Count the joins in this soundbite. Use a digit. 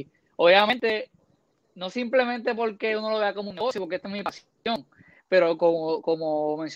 0